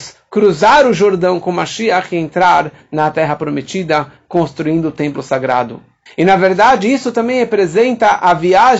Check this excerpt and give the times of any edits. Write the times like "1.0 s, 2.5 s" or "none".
none